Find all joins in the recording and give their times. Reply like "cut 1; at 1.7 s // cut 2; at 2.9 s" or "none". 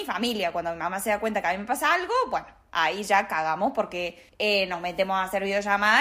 cut 1; at 4.3 s